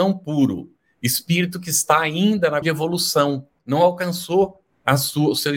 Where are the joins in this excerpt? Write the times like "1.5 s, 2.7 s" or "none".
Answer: 2.6 s